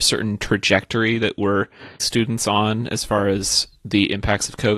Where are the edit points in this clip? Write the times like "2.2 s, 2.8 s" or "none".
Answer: 2.0 s